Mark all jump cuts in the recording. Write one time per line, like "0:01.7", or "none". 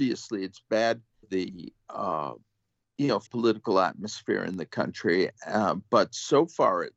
0:01.2
0:02.8
0:03.3